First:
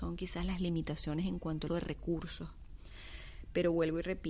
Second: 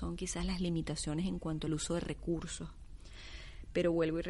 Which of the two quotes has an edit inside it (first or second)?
first